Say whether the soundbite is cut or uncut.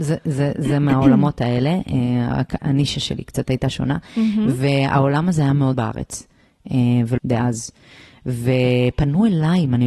cut